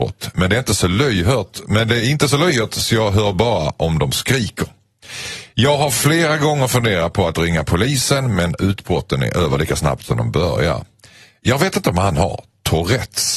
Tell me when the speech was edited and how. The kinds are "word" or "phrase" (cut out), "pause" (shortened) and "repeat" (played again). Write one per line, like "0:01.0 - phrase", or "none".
none